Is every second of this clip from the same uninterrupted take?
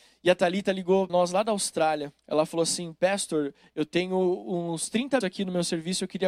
no; 3 cuts; at 1.1 s, 2.2 s, 5.2 s

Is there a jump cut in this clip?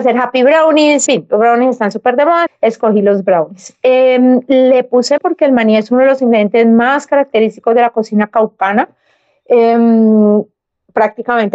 yes; 3 cuts; at 1.1 s, 2.5 s, 5.2 s

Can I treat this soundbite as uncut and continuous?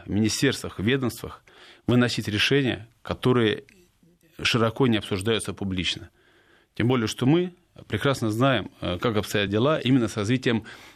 yes; 0 cuts

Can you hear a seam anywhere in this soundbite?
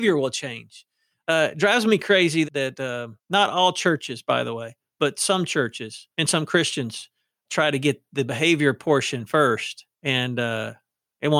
yes; 5 cuts; at 2.4 s, 3.2 s, 6.1 s, 7.5 s, 9.9 s

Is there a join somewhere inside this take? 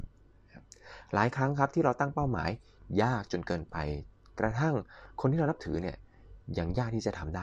no; 0 cuts

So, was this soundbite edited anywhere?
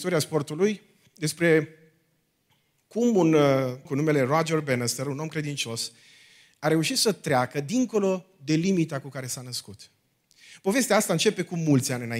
yes; 1 cut; at 3.8 s

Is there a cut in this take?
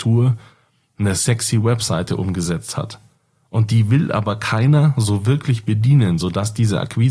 no; 0 cuts

